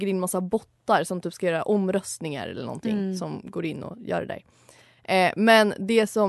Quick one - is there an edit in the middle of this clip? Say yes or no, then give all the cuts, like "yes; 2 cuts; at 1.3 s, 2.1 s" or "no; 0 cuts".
no; 0 cuts